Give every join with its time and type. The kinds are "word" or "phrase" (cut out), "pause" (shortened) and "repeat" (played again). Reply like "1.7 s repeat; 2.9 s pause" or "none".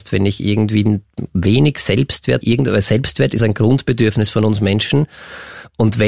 2.4 s phrase; 3.4 s word